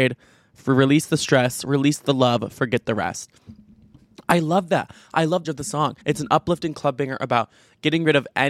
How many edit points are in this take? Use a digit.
2